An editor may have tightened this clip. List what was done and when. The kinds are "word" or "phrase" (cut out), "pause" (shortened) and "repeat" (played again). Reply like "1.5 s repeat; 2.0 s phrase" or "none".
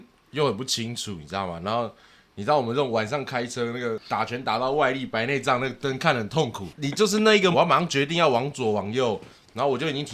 7.5 s word

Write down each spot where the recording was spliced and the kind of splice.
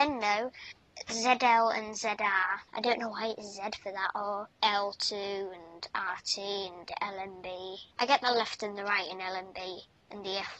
2.7 s pause; 4.5 s pause; 7.9 s pause

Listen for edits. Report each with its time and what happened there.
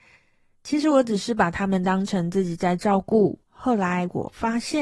3.4 s pause

